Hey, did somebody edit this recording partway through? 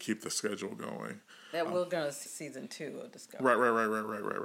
yes; 1 cut; at 2.3 s

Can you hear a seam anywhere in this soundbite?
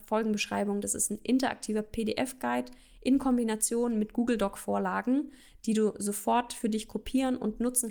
no; 0 cuts

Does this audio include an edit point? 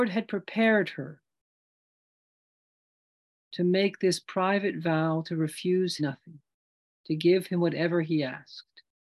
yes; 1 cut; at 6.0 s

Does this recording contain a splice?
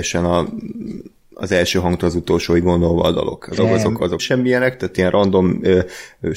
yes; 2 cuts; at 3.6 s, 4.2 s

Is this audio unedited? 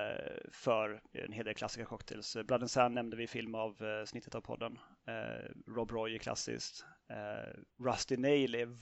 yes; 0 cuts

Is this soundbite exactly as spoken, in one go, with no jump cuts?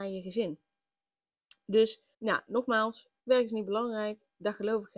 no; 2 cuts; at 2.1 s, 3.2 s

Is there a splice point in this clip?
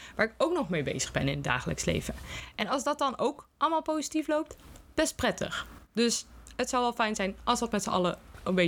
no; 0 cuts

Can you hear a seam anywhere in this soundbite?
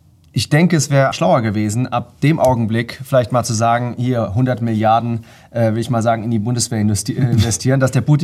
yes; 1 cut; at 1.1 s

